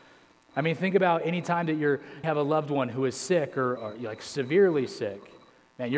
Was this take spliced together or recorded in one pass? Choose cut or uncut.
cut